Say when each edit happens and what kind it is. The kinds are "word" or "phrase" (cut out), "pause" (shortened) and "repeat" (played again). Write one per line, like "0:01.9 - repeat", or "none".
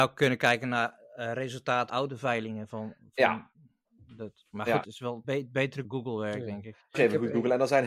0:01.9 - word
0:04.5 - word
0:04.8 - word
0:05.2 - word
0:05.8 - word
0:06.9 - word